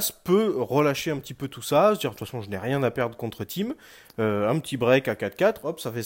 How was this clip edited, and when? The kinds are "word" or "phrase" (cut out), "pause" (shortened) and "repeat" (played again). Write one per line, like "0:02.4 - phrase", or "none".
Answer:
none